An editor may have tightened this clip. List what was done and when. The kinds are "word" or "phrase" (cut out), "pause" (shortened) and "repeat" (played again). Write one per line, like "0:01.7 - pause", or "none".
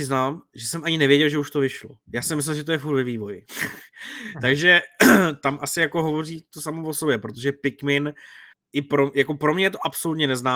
0:08.5 - pause